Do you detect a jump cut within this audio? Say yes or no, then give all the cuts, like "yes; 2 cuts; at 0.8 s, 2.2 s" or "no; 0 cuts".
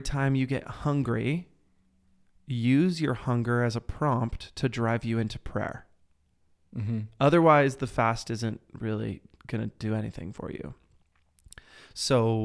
no; 0 cuts